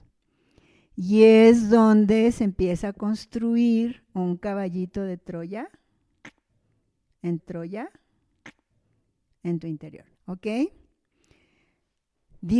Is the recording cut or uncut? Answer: cut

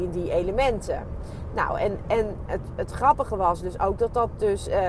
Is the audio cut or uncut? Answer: uncut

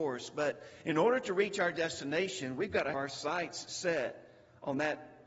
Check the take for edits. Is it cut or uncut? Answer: cut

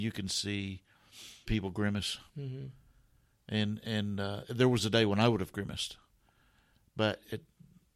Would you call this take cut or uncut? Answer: cut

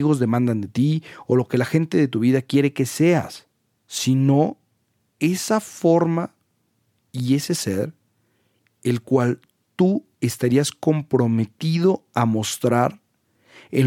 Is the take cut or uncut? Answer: uncut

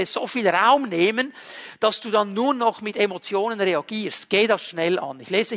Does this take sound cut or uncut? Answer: uncut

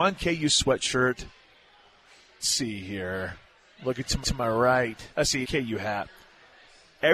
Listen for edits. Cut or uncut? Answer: cut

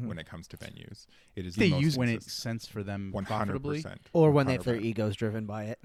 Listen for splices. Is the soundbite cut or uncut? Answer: cut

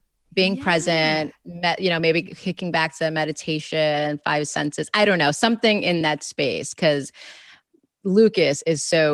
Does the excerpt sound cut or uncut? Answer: uncut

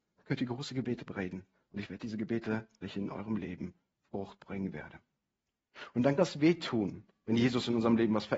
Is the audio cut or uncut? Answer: cut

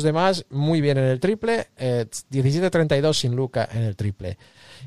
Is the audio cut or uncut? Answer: uncut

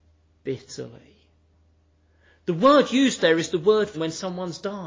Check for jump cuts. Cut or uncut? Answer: cut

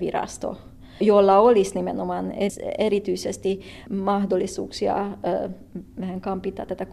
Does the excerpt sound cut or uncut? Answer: uncut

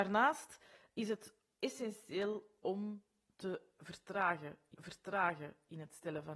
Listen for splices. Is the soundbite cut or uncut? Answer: cut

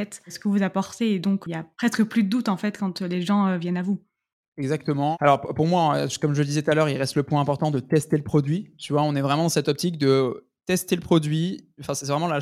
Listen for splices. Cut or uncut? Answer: cut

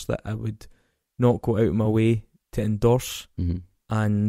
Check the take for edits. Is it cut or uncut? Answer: uncut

